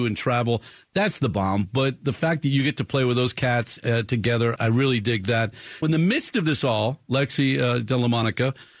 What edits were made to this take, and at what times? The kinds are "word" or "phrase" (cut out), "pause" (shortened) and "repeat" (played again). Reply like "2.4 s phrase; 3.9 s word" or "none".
4.6 s word; 5.8 s word